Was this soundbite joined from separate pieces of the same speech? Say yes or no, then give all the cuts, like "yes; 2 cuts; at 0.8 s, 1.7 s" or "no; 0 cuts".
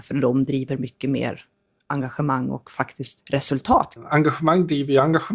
yes; 1 cut; at 3.2 s